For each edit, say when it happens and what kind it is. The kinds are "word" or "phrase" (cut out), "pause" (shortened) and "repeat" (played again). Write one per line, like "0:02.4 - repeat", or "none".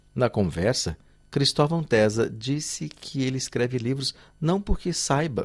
none